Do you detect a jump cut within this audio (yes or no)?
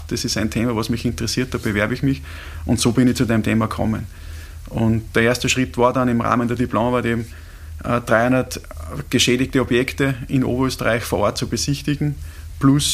no